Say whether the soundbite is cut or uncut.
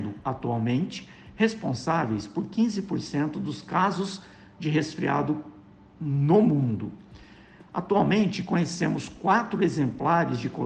uncut